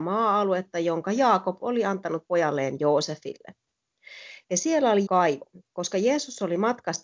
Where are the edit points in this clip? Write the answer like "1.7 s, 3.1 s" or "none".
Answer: 5.1 s